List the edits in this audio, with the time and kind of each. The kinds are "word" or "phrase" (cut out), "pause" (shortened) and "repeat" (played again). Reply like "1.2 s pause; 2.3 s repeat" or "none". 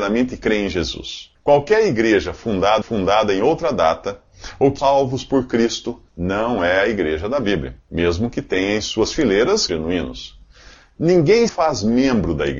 1.3 s pause; 2.8 s repeat; 4.8 s phrase; 6.1 s pause; 7.8 s pause; 9.7 s word; 11.5 s word